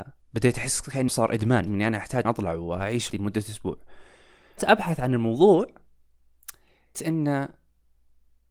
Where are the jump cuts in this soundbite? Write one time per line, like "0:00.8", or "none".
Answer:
0:01.1
0:01.7
0:02.2
0:03.1
0:04.6
0:06.9